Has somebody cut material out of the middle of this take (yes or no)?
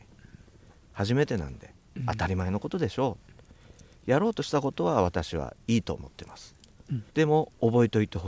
yes